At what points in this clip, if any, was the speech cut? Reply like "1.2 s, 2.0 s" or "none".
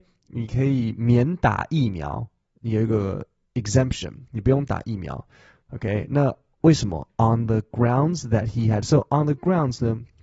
none